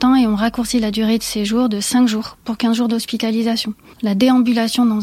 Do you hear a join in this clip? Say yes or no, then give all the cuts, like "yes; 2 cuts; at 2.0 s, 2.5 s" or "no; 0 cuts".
no; 0 cuts